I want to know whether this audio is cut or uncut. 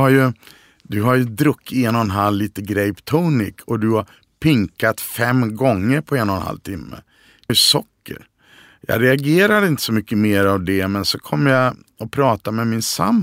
cut